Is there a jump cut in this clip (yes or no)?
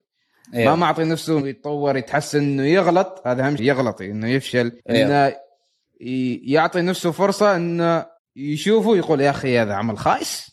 yes